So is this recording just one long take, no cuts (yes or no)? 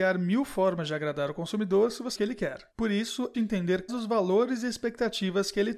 no